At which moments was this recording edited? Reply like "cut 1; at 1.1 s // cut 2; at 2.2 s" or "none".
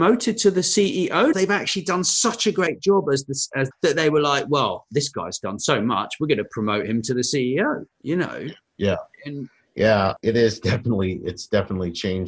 cut 1; at 1.3 s // cut 2; at 3.7 s // cut 3; at 7.9 s // cut 4; at 9.1 s